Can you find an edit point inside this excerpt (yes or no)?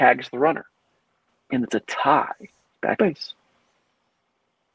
yes